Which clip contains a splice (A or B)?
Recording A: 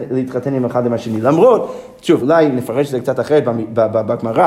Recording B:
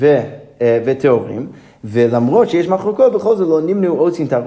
A